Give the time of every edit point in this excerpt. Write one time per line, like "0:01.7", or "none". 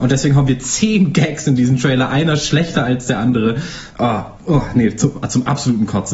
none